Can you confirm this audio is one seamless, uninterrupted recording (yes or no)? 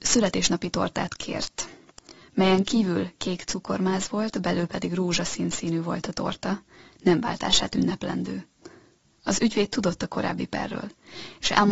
yes